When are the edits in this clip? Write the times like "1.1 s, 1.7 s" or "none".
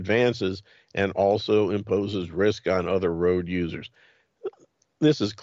none